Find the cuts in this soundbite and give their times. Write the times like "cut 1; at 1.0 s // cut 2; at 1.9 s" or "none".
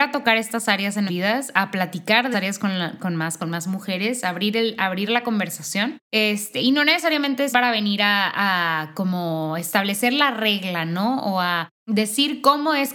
cut 1; at 1.1 s // cut 2; at 2.3 s // cut 3; at 3.4 s // cut 4; at 6.0 s // cut 5; at 7.5 s // cut 6; at 11.7 s